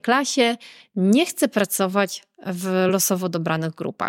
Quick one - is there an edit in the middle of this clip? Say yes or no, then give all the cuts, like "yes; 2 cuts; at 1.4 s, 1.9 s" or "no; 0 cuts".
no; 0 cuts